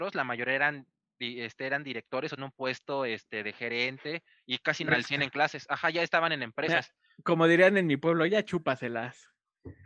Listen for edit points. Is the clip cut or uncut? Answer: cut